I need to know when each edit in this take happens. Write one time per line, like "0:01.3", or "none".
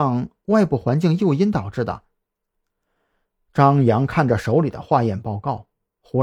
none